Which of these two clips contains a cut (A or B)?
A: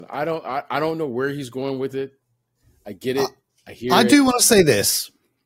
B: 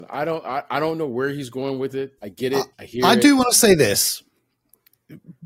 B